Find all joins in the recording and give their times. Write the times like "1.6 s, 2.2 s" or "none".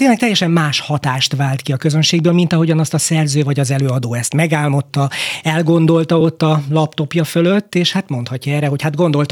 none